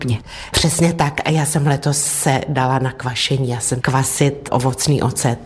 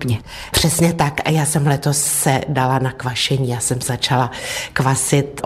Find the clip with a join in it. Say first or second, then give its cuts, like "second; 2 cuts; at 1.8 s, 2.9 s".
first; 1 cut; at 3.8 s